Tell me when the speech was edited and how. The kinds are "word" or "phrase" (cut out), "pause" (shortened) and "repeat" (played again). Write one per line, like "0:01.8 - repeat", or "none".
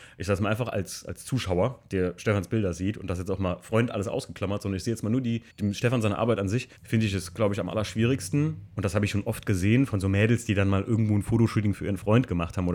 0:05.5 - pause
0:06.8 - pause
0:08.7 - pause